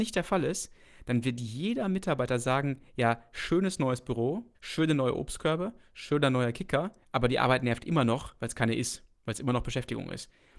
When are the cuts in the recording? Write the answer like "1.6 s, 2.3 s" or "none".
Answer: 4.5 s, 7.0 s